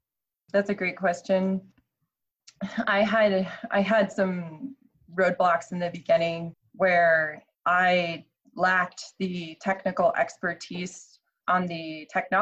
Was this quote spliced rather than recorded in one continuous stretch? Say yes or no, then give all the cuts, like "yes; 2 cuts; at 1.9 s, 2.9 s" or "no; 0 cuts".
no; 0 cuts